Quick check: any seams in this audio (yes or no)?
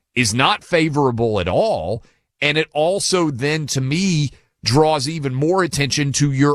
no